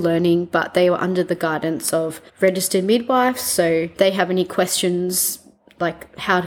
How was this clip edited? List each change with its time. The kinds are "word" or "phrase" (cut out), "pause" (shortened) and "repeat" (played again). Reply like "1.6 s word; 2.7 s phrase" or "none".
2.3 s pause; 4.0 s word